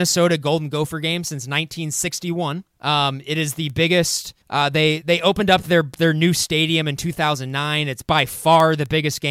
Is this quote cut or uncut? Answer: cut